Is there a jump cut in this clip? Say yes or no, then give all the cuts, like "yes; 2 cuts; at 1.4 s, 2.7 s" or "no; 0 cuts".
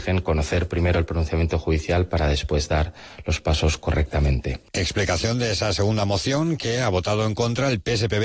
no; 0 cuts